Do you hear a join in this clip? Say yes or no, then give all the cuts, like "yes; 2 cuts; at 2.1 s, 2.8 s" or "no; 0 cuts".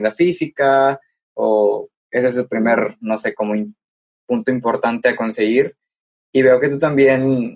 no; 0 cuts